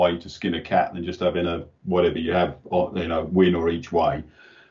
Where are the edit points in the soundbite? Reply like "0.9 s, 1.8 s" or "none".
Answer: none